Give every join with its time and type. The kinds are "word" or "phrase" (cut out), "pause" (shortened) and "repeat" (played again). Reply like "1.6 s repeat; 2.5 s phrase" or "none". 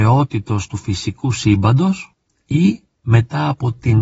none